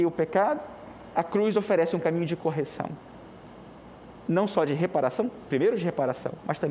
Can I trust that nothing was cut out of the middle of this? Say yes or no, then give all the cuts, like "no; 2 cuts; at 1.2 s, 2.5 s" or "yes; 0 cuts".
yes; 0 cuts